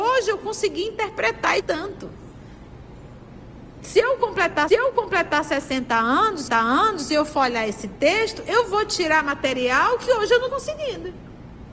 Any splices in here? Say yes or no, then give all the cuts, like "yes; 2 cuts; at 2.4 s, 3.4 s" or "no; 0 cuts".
yes; 4 cuts; at 1.6 s, 4.7 s, 6.5 s, 10.5 s